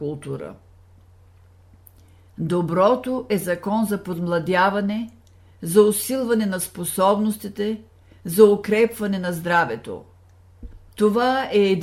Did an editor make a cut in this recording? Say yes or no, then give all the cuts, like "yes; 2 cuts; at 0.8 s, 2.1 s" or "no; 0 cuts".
no; 0 cuts